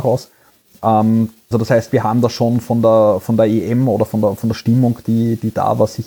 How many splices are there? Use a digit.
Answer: 1